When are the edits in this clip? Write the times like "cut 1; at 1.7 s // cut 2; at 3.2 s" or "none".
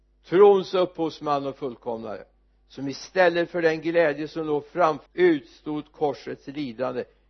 cut 1; at 5.1 s